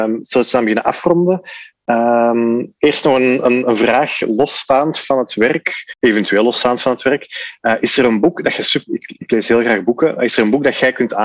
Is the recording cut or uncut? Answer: uncut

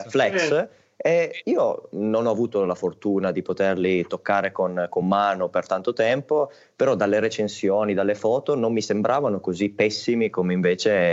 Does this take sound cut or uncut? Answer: uncut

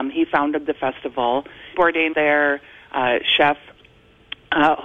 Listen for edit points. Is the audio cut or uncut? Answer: cut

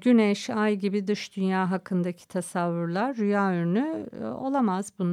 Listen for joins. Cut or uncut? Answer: uncut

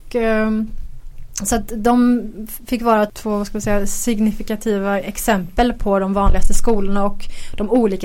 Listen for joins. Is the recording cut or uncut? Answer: uncut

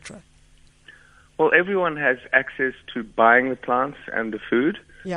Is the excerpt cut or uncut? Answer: uncut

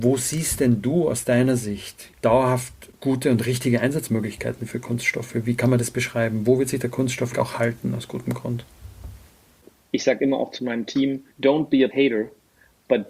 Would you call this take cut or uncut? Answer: cut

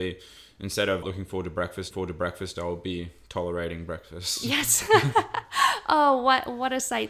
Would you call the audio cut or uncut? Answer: cut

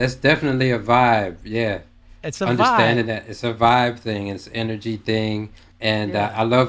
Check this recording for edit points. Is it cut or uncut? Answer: cut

